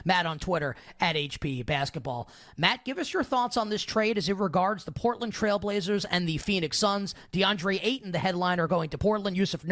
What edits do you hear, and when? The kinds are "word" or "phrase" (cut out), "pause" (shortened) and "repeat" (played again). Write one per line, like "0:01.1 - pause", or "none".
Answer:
none